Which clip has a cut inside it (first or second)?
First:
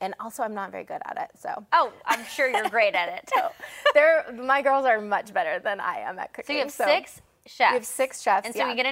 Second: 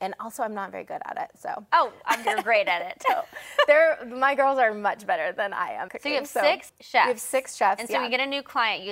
second